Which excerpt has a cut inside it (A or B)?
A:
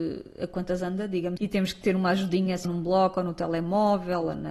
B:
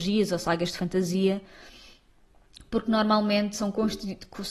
A